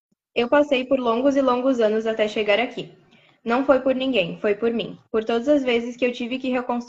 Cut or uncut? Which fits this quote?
uncut